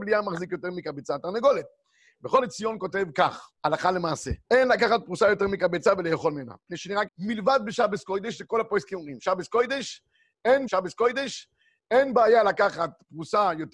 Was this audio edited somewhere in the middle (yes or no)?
yes